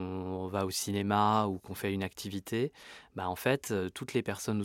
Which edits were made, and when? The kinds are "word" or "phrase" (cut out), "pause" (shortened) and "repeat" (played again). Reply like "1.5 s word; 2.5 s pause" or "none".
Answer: none